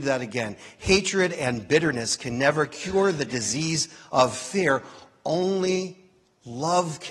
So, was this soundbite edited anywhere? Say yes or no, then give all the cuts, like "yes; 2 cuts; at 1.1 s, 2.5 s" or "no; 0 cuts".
no; 0 cuts